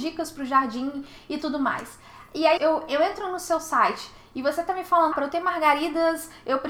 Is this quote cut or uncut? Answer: cut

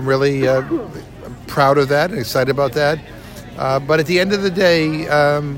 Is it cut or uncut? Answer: uncut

